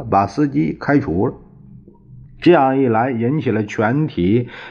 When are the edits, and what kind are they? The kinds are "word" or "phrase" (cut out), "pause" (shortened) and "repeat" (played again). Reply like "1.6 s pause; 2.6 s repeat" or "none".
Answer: 2.2 s pause

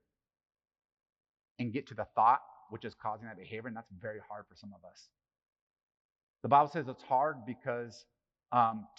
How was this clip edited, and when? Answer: none

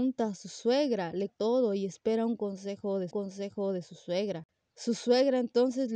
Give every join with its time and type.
1.3 s word; 3.1 s repeat

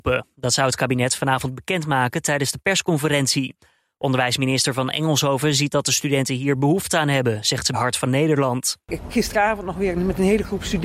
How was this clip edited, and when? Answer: 7.7 s word; 9.1 s word

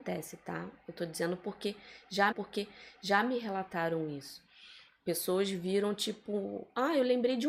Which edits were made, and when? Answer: 2.3 s repeat

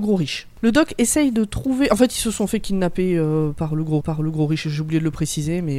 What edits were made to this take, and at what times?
4.0 s repeat

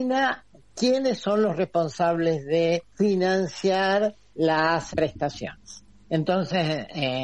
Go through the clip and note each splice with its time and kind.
2.9 s pause; 4.9 s word

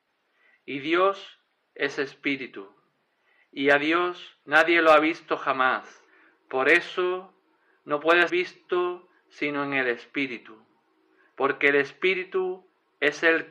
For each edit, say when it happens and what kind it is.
4.4 s pause; 6.1 s pause; 8.3 s word

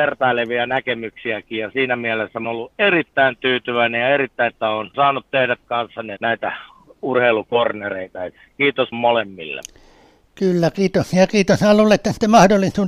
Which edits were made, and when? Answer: 2.4 s word; 4.5 s word; 4.9 s word; 5.6 s word; 6.2 s word; 8.9 s word

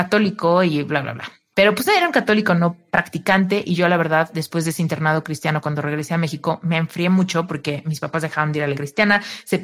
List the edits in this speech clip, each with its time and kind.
8.7 s word

